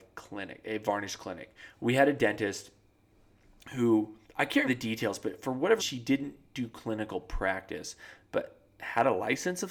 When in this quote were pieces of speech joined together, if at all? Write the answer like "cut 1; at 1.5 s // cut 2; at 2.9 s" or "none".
cut 1; at 4.2 s // cut 2; at 4.6 s // cut 3; at 5.8 s